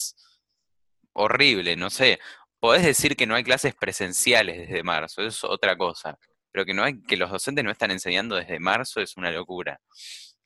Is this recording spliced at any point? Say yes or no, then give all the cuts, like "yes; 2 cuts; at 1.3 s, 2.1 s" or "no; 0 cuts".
no; 0 cuts